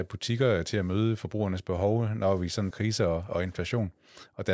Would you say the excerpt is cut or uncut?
cut